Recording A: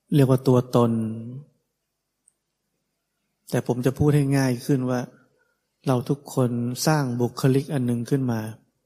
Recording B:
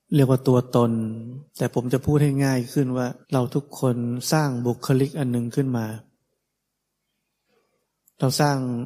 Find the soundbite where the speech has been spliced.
B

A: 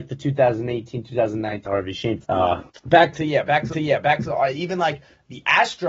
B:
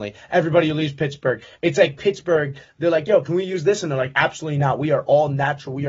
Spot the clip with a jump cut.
A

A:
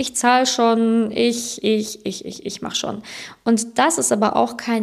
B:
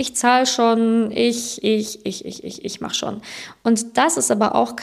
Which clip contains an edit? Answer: B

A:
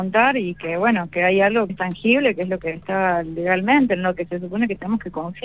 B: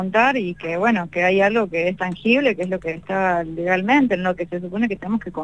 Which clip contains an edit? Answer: A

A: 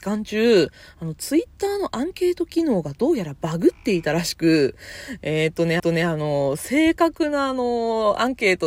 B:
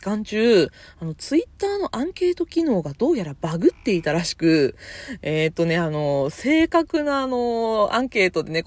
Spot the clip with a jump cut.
A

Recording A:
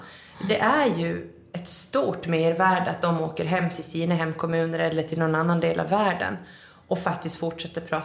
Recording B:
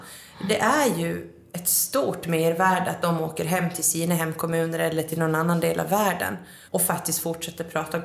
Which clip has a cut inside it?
B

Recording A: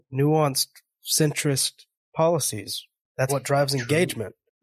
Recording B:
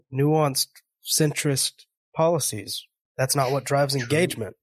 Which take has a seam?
A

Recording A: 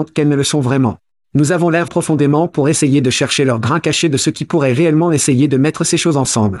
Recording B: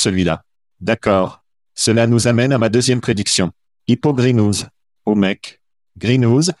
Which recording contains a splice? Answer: A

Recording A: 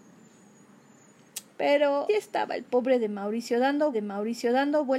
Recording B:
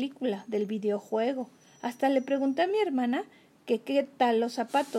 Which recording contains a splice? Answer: A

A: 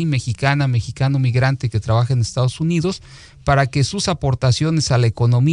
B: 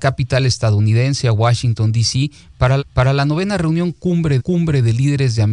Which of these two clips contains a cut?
B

